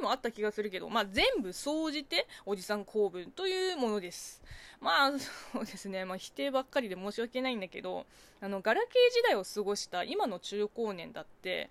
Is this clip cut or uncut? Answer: uncut